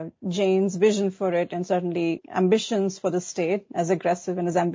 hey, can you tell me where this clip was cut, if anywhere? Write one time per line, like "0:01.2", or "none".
0:02.2